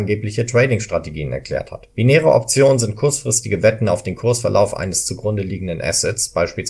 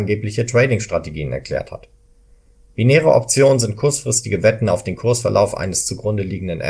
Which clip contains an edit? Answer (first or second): first